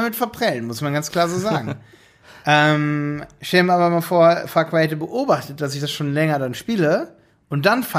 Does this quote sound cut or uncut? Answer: uncut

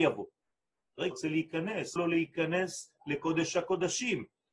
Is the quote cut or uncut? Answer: cut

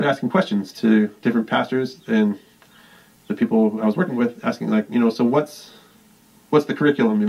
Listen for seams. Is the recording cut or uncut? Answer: uncut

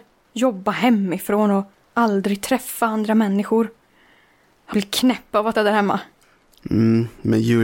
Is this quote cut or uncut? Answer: cut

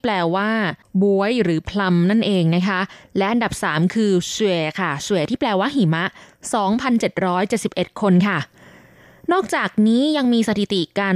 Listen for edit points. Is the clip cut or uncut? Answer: uncut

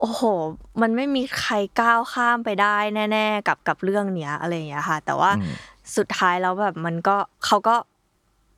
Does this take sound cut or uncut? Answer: cut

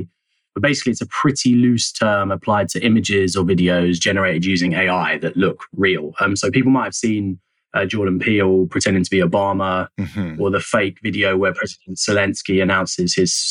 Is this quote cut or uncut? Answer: uncut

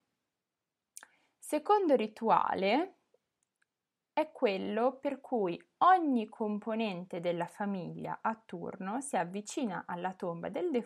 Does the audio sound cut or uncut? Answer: uncut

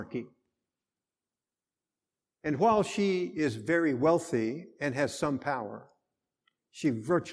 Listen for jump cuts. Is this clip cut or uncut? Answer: uncut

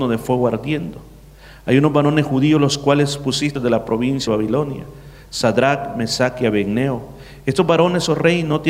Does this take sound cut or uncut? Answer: cut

